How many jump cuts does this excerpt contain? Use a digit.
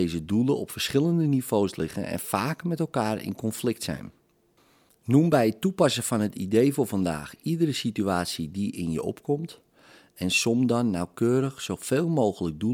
0